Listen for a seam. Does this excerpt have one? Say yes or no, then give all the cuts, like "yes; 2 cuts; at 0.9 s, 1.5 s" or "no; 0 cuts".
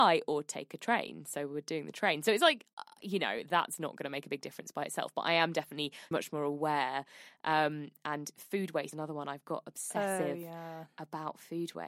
yes; 2 cuts; at 6.1 s, 8.9 s